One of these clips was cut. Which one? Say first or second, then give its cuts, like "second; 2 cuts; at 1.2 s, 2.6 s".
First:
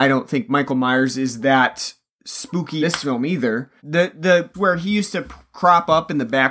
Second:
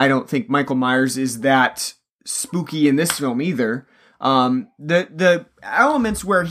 first; 3 cuts; at 2.8 s, 3.8 s, 4.5 s